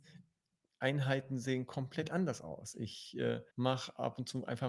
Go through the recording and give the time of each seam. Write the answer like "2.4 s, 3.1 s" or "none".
3.5 s